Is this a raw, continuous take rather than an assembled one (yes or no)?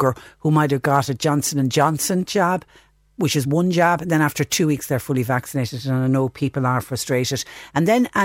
yes